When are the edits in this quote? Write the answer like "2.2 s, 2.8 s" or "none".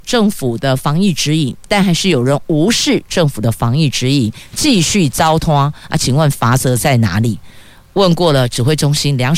none